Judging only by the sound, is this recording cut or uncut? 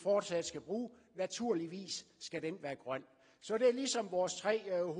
uncut